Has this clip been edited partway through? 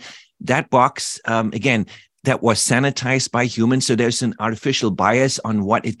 no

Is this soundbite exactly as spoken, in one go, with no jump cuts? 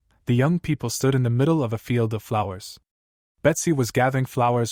yes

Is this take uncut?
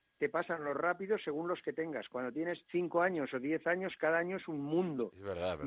no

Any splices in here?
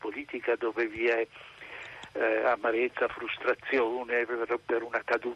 no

